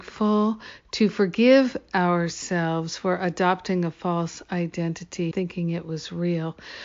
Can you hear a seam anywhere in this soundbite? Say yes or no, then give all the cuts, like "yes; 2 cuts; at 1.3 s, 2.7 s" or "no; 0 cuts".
yes; 1 cut; at 5.3 s